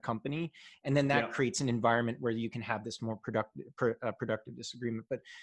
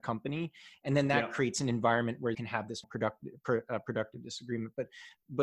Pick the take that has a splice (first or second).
second